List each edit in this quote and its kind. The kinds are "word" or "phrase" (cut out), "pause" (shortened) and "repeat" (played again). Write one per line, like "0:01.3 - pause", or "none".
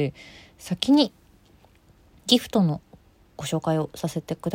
none

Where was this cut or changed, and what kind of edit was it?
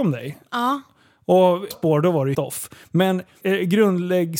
0:01.7 - word
0:02.3 - word
0:03.4 - word

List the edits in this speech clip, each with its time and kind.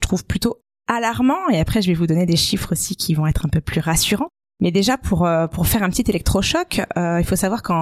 0:04.4 - pause

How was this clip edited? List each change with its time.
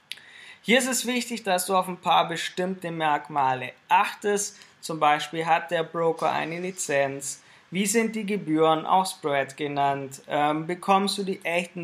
none

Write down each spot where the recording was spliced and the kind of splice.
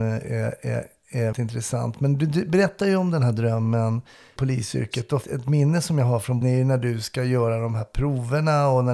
0:01.3 - word
0:04.4 - word
0:05.2 - word
0:06.4 - word

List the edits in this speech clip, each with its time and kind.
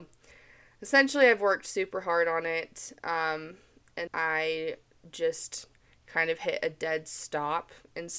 0:04.1 - word

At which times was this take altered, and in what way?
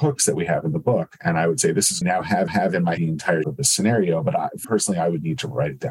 0:02.0 - phrase
0:02.5 - repeat
0:03.0 - word
0:03.4 - word
0:04.6 - word

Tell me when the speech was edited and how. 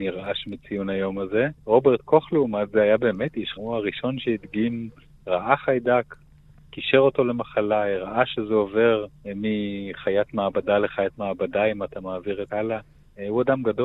0:01.6 - pause
0:03.6 - word
0:09.2 - pause
0:12.5 - word

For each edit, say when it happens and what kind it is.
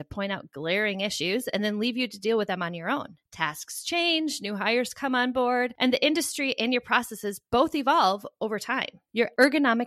none

